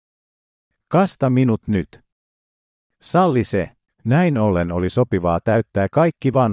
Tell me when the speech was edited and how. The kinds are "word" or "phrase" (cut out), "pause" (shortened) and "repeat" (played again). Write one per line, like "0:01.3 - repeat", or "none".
0:03.8 - pause